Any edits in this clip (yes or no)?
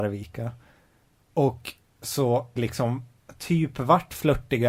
yes